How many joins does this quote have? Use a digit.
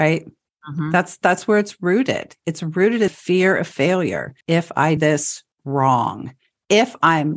4